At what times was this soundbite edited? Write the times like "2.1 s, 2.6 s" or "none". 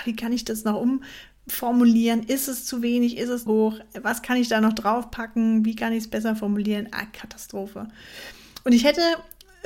3.5 s